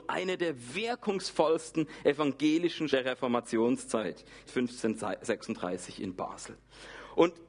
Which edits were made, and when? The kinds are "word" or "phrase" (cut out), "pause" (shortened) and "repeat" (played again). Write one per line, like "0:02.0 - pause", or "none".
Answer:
0:02.9 - word
0:04.4 - word